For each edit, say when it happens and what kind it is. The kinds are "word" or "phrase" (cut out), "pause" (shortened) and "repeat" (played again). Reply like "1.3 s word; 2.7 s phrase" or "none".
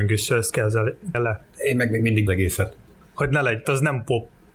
1.1 s word; 2.3 s phrase; 3.6 s word